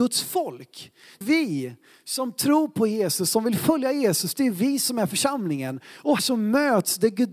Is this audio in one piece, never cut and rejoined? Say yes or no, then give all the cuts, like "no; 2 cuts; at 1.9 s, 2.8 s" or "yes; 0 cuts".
no; 2 cuts; at 1.2 s, 6.2 s